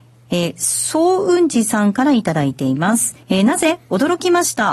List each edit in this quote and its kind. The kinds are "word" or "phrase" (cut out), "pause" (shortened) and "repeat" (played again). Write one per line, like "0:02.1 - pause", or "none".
0:03.2 - pause